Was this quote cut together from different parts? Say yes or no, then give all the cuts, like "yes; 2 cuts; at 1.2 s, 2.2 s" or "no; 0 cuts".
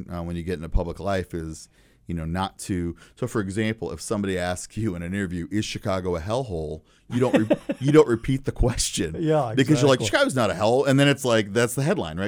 no; 0 cuts